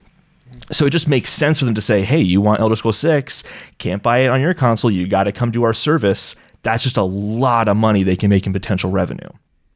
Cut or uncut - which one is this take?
uncut